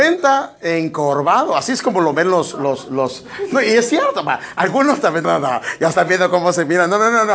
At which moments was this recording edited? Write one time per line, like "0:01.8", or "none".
0:05.2